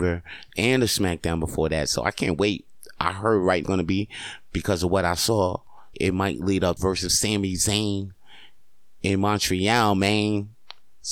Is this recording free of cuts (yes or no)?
no